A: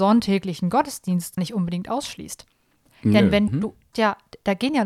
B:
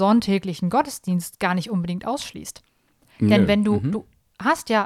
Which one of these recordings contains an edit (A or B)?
A